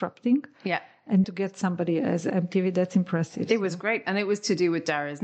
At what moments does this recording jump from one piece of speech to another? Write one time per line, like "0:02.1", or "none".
0:01.2